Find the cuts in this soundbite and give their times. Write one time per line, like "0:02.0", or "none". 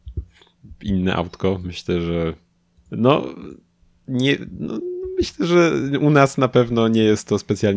0:02.5

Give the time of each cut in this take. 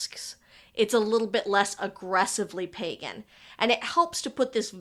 none

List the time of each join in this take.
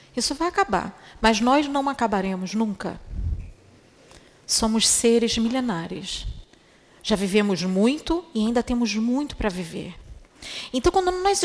none

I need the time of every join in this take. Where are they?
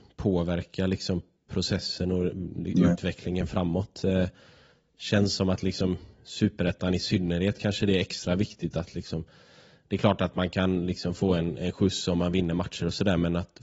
none

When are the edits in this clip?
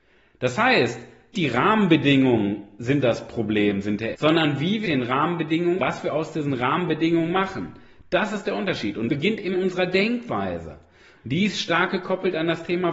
0:01.3
0:04.1
0:04.8
0:05.8
0:09.1
0:09.5

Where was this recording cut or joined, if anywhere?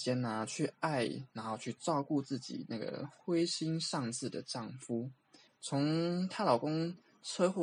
0:05.5

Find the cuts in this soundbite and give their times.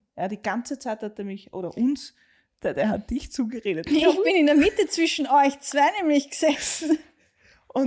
none

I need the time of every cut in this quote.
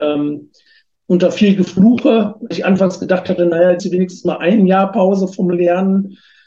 0:02.5
0:03.8

